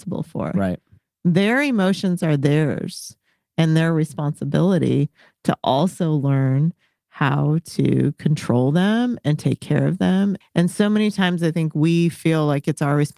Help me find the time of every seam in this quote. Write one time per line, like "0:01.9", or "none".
0:10.4